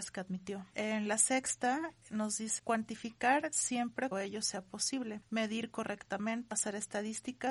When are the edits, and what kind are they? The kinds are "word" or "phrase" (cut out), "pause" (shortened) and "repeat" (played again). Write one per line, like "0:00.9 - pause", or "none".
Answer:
0:02.6 - word
0:04.1 - word
0:06.5 - word